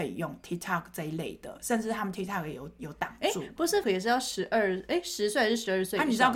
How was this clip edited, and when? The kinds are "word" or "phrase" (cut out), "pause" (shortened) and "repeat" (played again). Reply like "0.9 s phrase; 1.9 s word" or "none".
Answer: 3.8 s word